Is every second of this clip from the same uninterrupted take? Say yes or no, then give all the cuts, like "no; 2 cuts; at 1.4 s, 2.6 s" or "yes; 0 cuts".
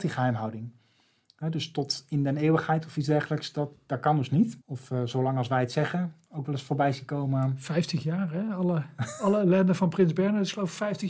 no; 1 cut; at 4.6 s